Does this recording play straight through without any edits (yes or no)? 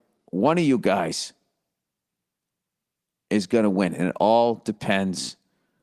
yes